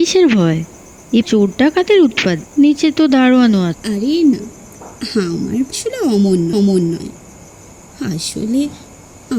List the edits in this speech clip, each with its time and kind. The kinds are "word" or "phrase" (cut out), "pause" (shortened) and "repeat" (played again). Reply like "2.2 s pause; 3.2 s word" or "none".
1.2 s word; 2.4 s word; 3.7 s word; 4.3 s word; 5.7 s word; 6.5 s repeat